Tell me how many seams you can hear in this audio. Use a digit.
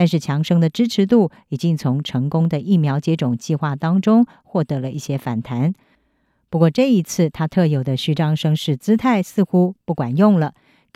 0